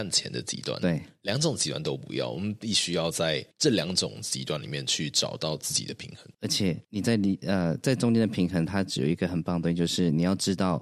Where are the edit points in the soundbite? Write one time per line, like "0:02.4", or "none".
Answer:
0:03.5
0:06.3